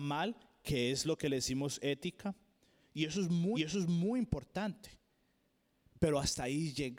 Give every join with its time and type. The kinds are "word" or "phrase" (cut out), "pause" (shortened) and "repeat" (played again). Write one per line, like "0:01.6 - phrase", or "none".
0:03.5 - repeat